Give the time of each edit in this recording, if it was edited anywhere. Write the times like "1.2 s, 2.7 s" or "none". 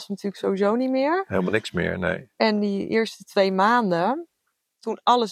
none